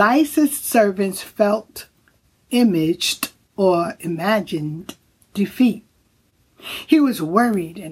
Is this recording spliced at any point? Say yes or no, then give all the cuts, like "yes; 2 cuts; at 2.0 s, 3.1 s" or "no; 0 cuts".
no; 0 cuts